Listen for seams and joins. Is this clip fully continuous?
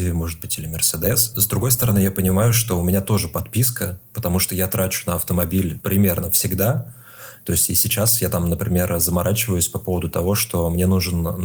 yes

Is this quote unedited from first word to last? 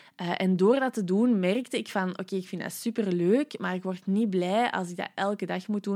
yes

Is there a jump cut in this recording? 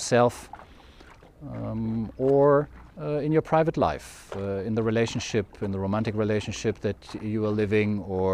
yes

